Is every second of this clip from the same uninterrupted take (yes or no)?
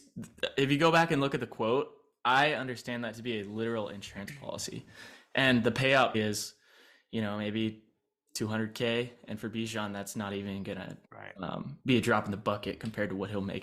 no